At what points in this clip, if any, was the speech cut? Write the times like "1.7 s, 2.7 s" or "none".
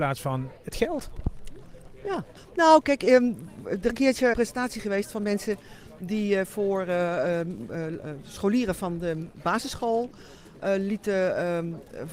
3.9 s, 4.3 s

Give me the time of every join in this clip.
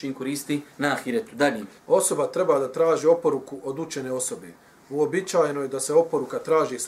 1.8 s

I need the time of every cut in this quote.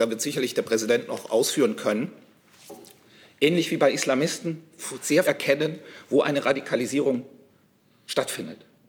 5.2 s

